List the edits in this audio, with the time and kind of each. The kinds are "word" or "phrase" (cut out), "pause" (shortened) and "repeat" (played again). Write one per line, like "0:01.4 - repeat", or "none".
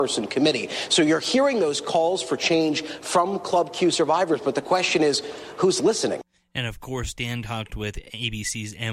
none